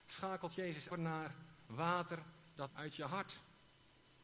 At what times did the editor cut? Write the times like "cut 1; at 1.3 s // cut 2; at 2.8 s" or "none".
cut 1; at 0.9 s // cut 2; at 2.7 s